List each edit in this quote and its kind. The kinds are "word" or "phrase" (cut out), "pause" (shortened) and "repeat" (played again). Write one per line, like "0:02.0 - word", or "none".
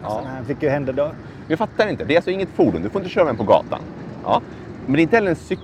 none